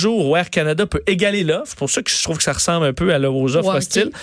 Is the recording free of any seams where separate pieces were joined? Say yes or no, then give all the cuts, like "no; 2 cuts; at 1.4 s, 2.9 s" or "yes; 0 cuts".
yes; 0 cuts